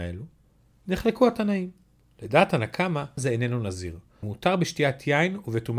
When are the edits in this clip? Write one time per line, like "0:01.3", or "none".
0:03.2
0:04.2